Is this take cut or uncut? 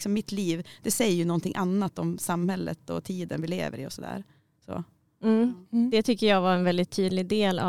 uncut